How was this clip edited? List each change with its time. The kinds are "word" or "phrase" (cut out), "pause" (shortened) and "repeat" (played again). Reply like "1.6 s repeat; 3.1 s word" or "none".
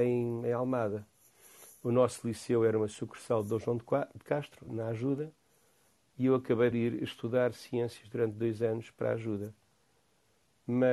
4.7 s word; 6.7 s word